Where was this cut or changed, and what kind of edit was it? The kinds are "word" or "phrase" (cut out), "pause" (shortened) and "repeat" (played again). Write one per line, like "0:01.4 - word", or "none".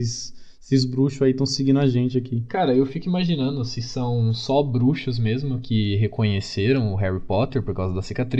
none